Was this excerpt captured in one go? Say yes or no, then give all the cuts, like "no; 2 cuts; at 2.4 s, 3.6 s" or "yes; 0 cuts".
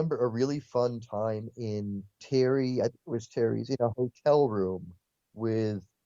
yes; 0 cuts